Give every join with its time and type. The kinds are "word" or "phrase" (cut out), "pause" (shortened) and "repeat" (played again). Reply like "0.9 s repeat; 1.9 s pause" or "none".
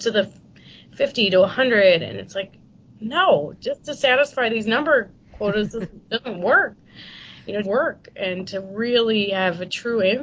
3.5 s word; 7.6 s phrase